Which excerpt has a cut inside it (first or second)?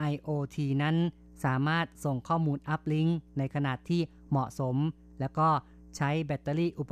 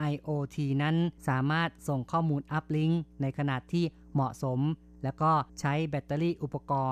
second